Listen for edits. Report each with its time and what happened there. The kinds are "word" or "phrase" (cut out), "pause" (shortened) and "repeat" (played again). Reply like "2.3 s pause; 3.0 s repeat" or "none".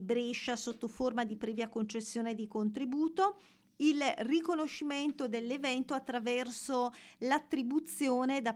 none